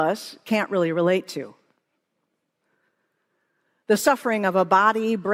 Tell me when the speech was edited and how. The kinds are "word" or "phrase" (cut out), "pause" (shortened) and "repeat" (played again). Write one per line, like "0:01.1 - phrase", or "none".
none